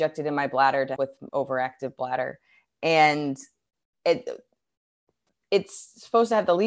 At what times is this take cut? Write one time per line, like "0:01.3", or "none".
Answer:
0:01.0
0:01.3

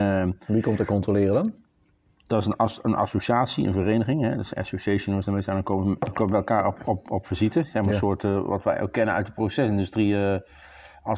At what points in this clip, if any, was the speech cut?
none

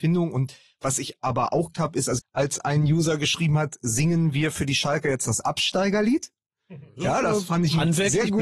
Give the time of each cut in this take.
0:01.7
0:02.2

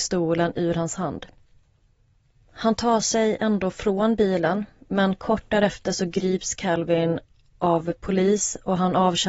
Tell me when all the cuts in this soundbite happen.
none

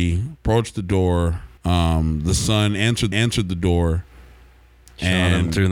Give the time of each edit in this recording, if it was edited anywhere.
0:01.6
0:03.1

